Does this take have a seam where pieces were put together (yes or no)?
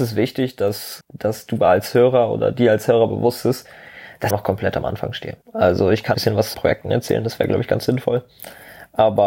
yes